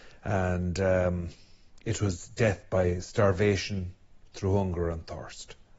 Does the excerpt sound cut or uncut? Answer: uncut